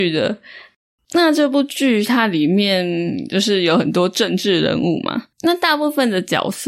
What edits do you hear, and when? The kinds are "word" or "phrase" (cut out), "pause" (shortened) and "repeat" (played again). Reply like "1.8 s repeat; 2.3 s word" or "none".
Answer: 5.3 s pause